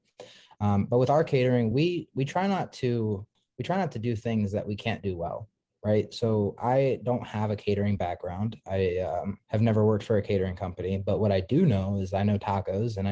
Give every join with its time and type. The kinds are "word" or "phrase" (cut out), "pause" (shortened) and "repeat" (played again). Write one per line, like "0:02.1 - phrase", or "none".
none